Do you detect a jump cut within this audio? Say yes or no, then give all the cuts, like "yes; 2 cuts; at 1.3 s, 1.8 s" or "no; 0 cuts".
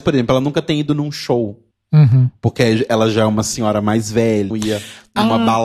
yes; 2 cuts; at 1.7 s, 4.5 s